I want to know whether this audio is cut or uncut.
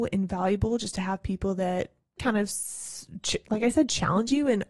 cut